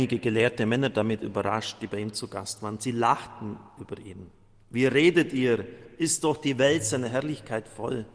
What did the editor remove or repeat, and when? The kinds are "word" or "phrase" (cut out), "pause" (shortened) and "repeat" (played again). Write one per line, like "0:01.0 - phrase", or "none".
none